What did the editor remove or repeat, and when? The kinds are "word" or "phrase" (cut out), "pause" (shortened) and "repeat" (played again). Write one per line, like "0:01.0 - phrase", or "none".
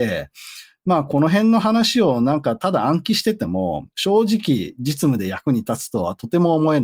0:03.9 - pause